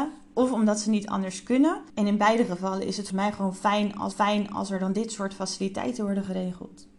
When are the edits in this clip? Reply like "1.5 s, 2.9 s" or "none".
1.9 s, 3.1 s, 4.1 s